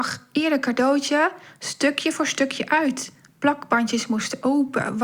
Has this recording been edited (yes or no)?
no